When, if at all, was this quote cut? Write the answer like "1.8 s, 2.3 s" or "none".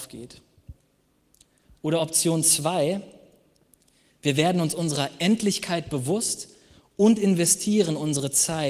none